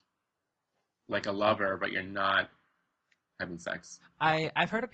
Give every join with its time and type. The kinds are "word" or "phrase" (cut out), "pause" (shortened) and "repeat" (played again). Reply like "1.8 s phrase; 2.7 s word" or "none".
none